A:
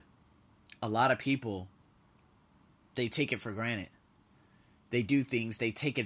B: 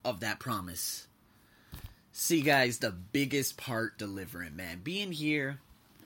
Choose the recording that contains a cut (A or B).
B